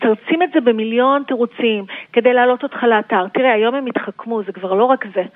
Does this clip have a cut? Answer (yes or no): no